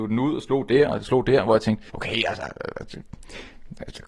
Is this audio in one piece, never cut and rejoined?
no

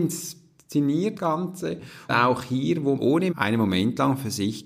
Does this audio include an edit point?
yes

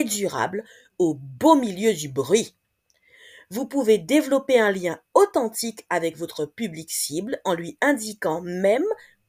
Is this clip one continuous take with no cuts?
yes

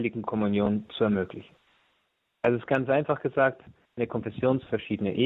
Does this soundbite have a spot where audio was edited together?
no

